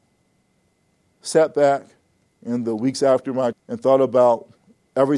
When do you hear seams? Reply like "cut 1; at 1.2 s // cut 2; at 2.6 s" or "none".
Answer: cut 1; at 2.2 s // cut 2; at 3.5 s